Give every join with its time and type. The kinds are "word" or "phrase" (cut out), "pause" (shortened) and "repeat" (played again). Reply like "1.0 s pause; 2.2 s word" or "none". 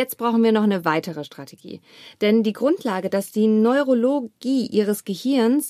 none

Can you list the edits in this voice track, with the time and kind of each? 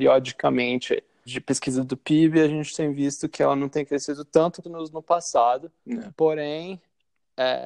1.3 s word; 4.6 s word; 5.8 s pause

